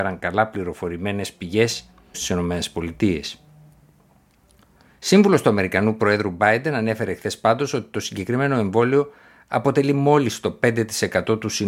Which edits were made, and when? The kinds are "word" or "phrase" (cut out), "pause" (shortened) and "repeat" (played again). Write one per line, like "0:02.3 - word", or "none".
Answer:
0:02.1 - phrase